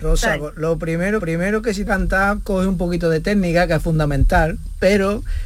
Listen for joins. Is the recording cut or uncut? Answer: cut